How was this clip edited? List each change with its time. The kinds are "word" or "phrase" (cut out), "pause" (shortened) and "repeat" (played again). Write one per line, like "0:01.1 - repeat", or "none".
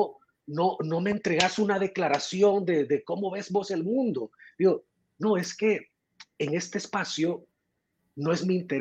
none